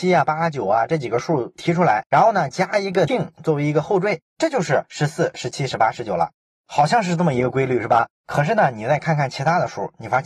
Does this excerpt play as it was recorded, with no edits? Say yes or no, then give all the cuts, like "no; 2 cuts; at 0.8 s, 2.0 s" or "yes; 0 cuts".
no; 3 cuts; at 3.1 s, 4.3 s, 8.1 s